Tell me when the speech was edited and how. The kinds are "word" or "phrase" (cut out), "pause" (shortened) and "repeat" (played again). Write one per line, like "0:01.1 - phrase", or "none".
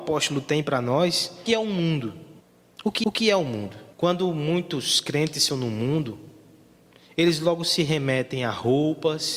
0:01.5 - phrase
0:02.4 - pause
0:03.0 - repeat
0:03.9 - pause
0:05.5 - word